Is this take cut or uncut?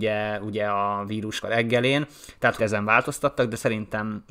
cut